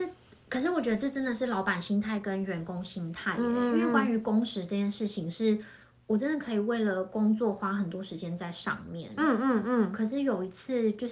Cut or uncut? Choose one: uncut